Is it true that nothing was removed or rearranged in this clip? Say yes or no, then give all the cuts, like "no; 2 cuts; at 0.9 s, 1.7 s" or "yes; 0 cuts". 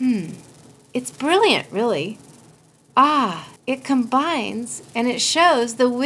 no; 1 cut; at 3.6 s